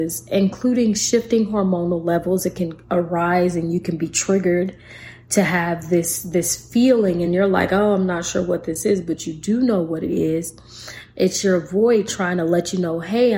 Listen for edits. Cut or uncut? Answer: uncut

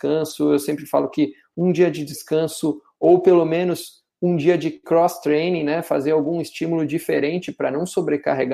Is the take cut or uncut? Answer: uncut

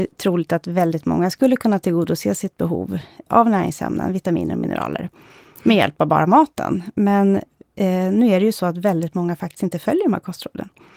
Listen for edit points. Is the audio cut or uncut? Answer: uncut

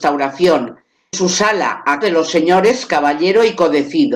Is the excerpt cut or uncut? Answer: cut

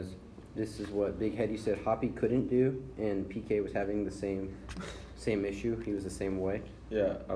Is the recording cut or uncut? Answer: uncut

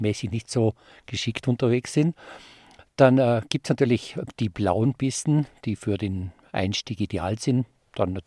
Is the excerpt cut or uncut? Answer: uncut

